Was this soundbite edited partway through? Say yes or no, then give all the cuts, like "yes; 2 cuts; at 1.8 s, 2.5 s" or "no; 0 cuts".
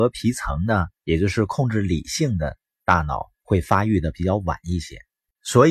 yes; 2 cuts; at 1.0 s, 3.3 s